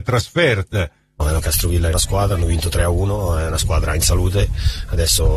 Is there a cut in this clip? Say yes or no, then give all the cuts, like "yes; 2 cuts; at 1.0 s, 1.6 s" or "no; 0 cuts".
yes; 2 cuts; at 1.4 s, 1.9 s